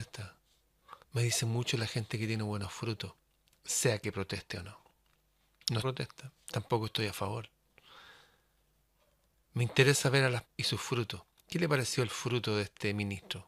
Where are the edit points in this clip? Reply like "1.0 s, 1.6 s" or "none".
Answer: 1.0 s, 5.8 s, 6.4 s, 10.4 s